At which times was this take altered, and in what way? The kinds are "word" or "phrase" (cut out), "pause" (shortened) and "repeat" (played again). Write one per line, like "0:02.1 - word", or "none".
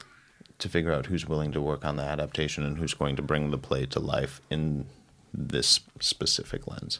none